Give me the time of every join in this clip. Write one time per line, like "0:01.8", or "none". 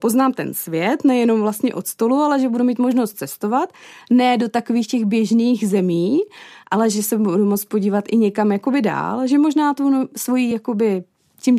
none